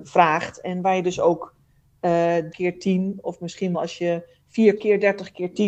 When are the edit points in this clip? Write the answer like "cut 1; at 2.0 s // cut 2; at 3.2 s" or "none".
cut 1; at 2.5 s // cut 2; at 3.7 s // cut 3; at 4.8 s